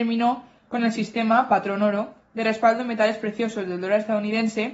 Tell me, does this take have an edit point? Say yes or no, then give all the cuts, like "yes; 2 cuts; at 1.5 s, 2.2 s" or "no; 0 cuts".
no; 0 cuts